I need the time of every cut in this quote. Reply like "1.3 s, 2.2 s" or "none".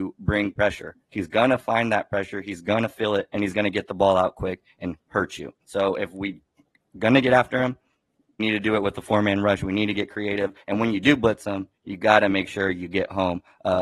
5.0 s, 5.6 s, 8.4 s